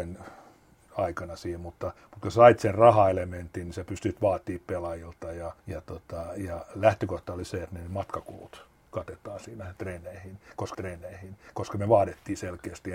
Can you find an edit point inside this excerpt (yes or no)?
yes